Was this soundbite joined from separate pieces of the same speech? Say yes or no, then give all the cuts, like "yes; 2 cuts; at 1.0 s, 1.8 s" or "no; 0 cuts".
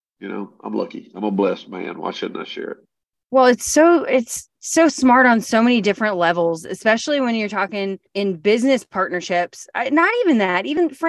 no; 0 cuts